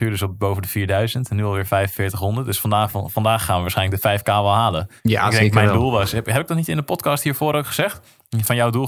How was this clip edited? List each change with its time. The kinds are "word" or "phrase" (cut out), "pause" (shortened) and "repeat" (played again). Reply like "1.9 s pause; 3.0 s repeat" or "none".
5.0 s pause